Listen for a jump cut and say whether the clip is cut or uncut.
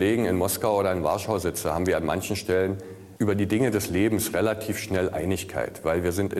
cut